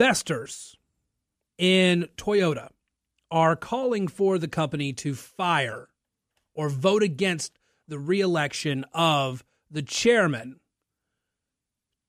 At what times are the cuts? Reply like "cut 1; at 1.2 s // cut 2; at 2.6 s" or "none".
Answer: none